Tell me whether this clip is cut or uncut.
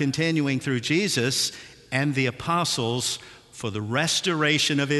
uncut